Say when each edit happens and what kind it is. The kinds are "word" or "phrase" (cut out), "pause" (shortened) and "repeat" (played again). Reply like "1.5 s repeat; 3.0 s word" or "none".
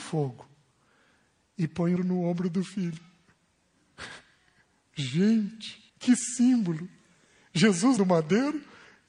2.0 s phrase; 5.9 s pause; 8.0 s word